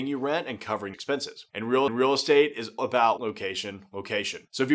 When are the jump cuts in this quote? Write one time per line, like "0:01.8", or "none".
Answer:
0:00.9
0:01.9
0:02.8
0:03.2